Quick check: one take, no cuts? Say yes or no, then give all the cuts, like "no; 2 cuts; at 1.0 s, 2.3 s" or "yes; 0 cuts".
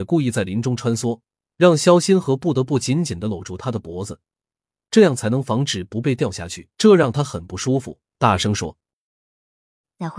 no; 1 cut; at 6.7 s